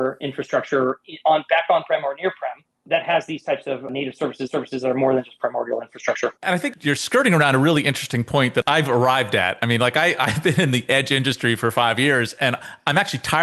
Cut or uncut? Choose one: cut